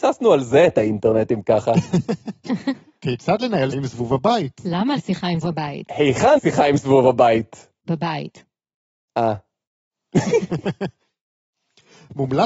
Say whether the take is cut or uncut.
cut